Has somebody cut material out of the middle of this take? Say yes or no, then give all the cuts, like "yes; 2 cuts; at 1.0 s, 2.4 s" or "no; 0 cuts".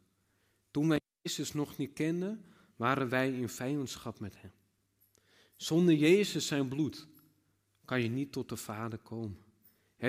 no; 0 cuts